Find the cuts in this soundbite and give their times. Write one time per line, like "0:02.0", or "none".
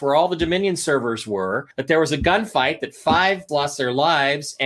0:01.7
0:03.5